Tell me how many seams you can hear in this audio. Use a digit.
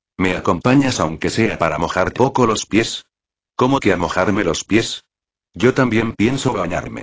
1